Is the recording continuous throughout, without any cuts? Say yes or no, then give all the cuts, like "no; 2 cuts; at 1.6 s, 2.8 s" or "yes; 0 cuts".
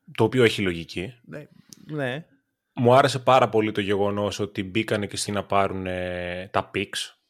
no; 1 cut; at 5.3 s